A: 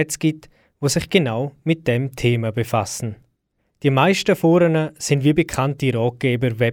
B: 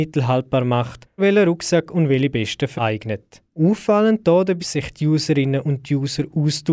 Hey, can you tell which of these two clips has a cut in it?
B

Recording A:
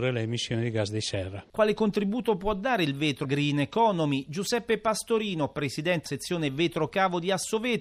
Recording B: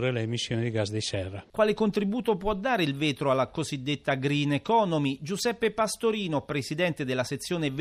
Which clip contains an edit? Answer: A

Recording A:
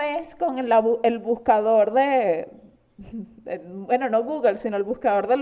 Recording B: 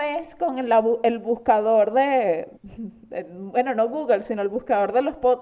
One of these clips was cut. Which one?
B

